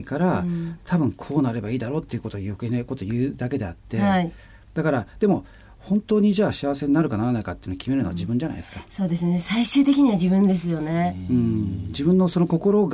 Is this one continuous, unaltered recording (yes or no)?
yes